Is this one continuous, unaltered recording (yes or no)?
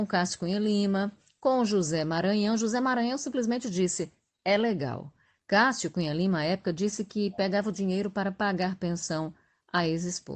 yes